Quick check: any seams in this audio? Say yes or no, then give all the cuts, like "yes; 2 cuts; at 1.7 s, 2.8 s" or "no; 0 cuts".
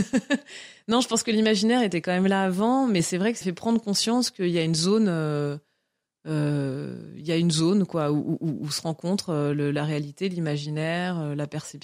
yes; 1 cut; at 3.4 s